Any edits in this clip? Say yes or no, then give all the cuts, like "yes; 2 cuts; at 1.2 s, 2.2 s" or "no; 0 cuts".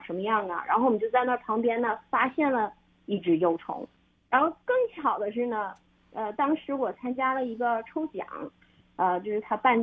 no; 0 cuts